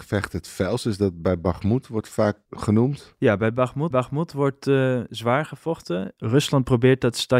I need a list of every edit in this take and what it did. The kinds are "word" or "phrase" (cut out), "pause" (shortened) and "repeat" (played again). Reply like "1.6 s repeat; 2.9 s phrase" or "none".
2.5 s pause; 3.9 s repeat

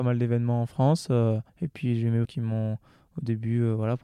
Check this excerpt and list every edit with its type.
1.5 s pause; 2.2 s phrase

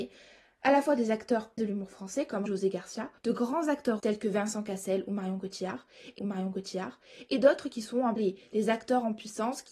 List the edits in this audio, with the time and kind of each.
1.6 s word; 2.5 s word; 3.2 s pause; 4.0 s word; 6.2 s repeat; 8.2 s word

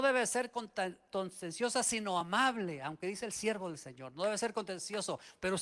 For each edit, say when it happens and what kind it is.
none

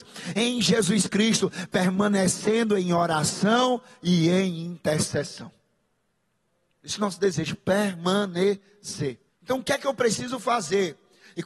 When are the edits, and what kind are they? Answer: 9.3 s pause

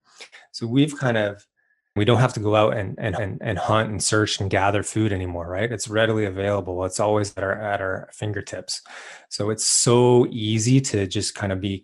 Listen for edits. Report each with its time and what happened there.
2.0 s word; 3.2 s repeat

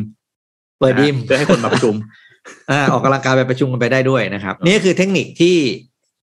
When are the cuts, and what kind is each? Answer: 4.6 s pause

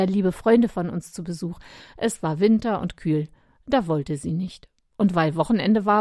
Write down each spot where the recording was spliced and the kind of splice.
none

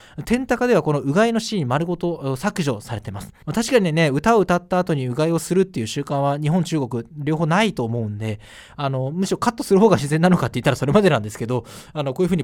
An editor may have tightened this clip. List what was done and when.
3.4 s pause

